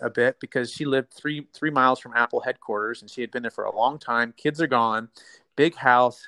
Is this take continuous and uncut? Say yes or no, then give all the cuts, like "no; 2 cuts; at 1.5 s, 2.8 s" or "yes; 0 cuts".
yes; 0 cuts